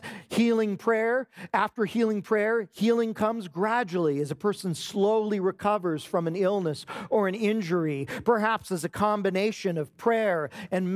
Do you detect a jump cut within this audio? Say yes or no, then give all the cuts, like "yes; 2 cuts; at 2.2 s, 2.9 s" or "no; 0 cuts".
no; 0 cuts